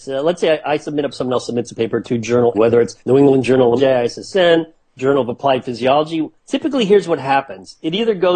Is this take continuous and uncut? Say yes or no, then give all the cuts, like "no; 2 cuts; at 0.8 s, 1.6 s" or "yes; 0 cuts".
no; 5 cuts; at 1.1 s, 2.5 s, 3.0 s, 3.8 s, 6.4 s